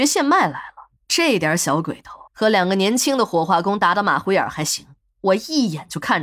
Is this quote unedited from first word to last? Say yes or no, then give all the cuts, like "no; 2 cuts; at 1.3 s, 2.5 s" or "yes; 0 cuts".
no; 2 cuts; at 1.0 s, 2.3 s